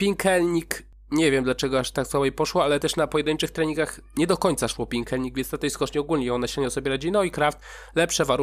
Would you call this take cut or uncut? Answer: uncut